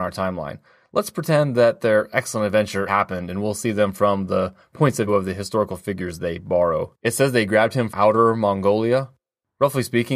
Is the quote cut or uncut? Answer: cut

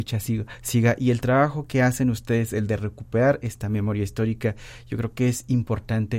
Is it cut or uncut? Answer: uncut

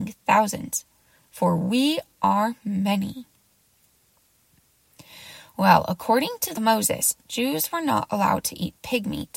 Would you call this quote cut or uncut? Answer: cut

